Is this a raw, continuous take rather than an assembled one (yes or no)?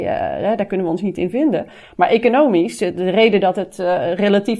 yes